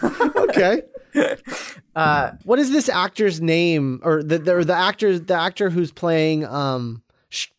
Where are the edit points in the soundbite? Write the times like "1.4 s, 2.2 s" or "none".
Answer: 2.4 s

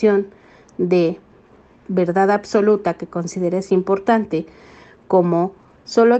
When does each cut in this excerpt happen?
none

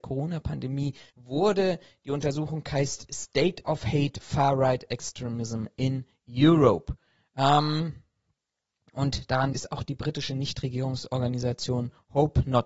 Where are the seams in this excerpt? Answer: 1.1 s, 9.5 s

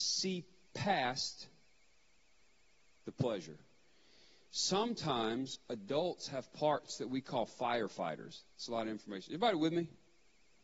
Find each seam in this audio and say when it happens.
none

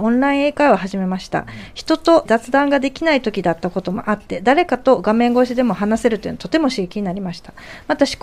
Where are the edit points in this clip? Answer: 2.3 s

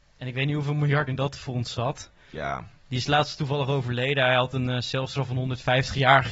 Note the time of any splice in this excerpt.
1.1 s

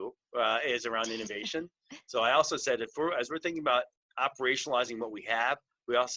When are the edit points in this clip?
none

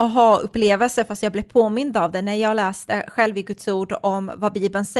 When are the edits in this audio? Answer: none

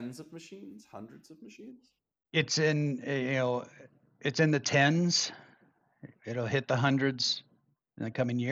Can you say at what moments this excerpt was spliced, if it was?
none

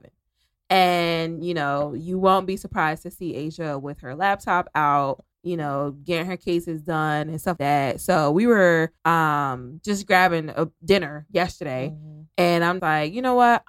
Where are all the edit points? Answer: 5.3 s, 7.6 s, 9.0 s, 12.8 s

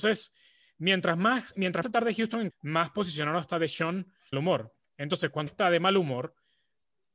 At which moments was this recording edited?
1.8 s, 2.5 s, 4.3 s, 5.5 s

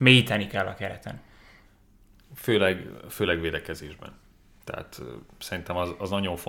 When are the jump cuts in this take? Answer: none

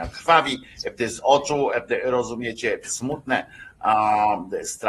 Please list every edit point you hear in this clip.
2.8 s

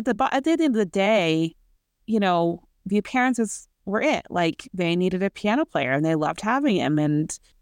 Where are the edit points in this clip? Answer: 1.8 s, 3.7 s

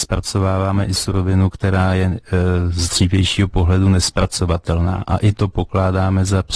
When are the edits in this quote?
none

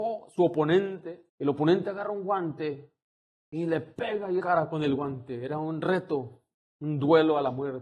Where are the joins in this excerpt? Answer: 1.3 s, 3.2 s, 4.4 s

